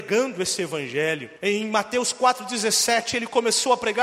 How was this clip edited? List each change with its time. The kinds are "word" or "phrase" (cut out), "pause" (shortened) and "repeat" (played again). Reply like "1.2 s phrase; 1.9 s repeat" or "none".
1.4 s pause